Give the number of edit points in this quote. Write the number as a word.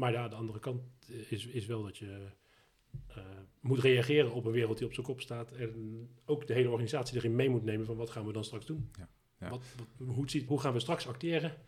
one